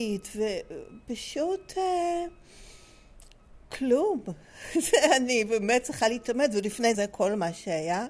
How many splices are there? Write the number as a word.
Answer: one